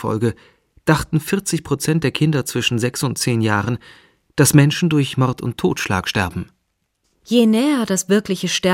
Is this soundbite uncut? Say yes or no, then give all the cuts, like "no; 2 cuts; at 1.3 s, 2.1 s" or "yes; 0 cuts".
yes; 0 cuts